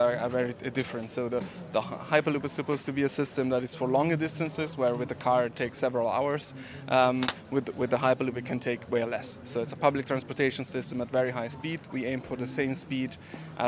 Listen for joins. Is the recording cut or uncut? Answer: uncut